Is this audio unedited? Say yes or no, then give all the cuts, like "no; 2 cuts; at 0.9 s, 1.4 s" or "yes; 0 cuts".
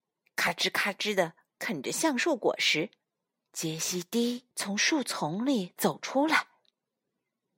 no; 2 cuts; at 3.0 s, 4.5 s